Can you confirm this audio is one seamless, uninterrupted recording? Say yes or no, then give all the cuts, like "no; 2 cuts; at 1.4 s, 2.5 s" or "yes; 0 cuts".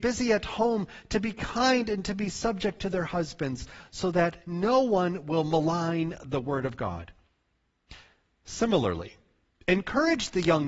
yes; 0 cuts